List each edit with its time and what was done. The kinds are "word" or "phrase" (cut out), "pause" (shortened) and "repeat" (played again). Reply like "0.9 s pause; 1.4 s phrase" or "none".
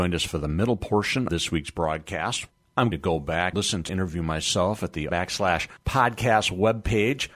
1.3 s word; 2.9 s word; 3.5 s word; 3.9 s word; 5.1 s word

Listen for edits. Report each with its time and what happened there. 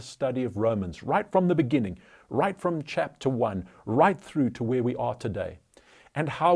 none

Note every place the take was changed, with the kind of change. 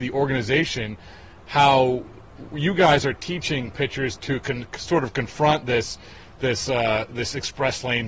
none

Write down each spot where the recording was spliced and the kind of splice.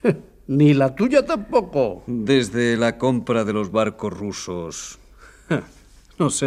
none

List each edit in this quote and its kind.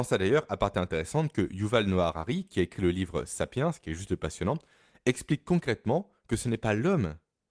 none

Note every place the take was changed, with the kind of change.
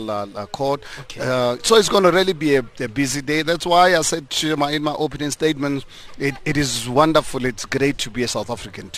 none

